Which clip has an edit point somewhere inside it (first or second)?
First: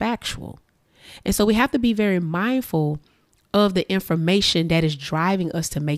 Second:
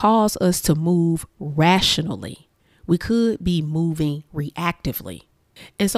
second